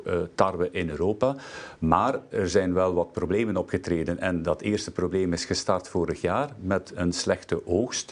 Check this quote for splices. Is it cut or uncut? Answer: uncut